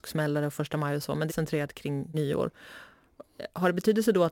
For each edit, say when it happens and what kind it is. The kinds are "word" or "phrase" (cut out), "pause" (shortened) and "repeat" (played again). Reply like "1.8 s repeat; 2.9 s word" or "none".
1.3 s phrase; 2.1 s word